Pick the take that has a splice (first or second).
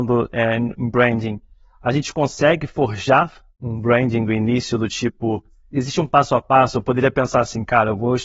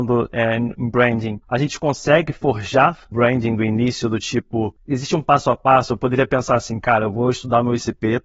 second